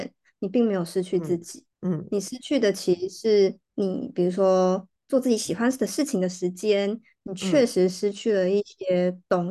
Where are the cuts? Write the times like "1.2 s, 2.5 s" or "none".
1.7 s, 3.6 s

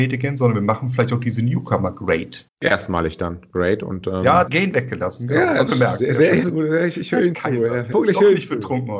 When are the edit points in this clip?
2.5 s, 4.5 s, 5.7 s, 6.4 s, 7.9 s

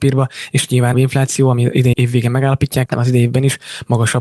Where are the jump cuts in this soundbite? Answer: 0.9 s, 1.9 s, 2.9 s

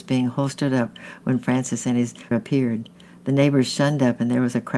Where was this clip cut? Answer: 2.3 s

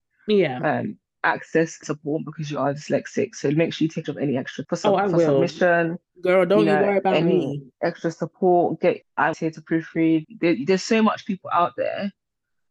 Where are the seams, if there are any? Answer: 1.8 s, 4.0 s, 4.6 s, 9.0 s, 9.3 s, 10.2 s

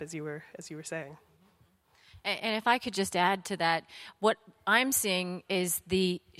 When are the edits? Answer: none

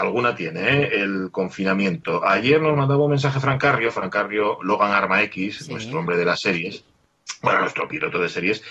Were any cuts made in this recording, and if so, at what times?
none

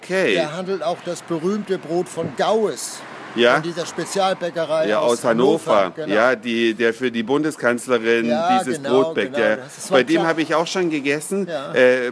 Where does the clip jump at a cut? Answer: none

